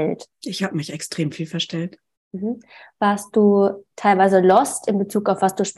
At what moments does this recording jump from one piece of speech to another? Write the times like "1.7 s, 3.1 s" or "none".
2.1 s, 3.9 s